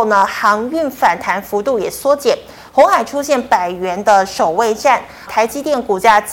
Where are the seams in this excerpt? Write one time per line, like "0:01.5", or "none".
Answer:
0:05.3